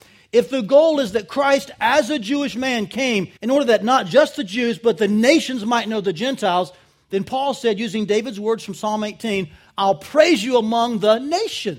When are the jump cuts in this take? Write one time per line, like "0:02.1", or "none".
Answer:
0:03.4

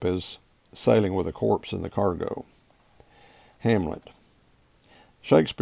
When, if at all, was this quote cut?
none

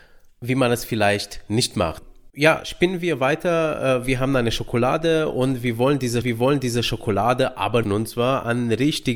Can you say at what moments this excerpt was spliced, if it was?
0:02.3
0:06.2
0:07.8

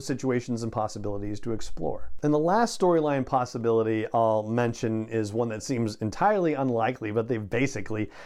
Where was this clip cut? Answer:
none

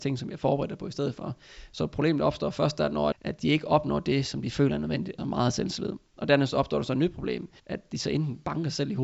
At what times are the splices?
0:03.1
0:05.2
0:07.6

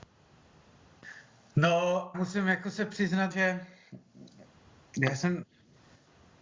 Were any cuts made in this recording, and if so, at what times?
0:02.1
0:03.3

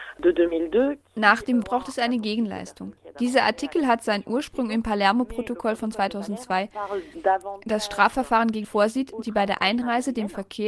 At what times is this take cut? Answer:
0:01.6
0:08.6

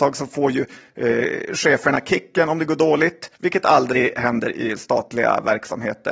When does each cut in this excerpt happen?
0:03.3

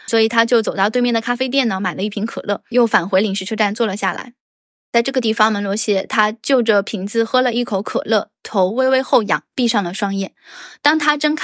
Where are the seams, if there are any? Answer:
0:02.7

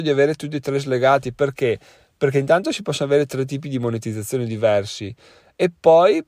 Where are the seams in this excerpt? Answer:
none

